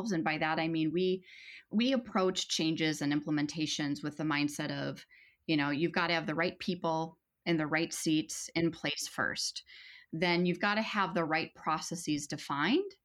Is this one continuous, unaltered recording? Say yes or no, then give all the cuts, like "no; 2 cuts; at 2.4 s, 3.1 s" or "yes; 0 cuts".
yes; 0 cuts